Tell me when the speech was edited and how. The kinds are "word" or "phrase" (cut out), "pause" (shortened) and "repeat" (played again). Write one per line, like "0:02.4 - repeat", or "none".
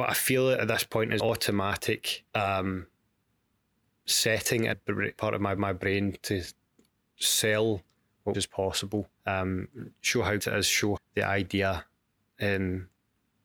0:01.2 - word
0:02.3 - pause
0:04.7 - word
0:05.2 - word
0:05.6 - repeat
0:08.3 - phrase
0:09.1 - pause
0:10.4 - word
0:11.0 - word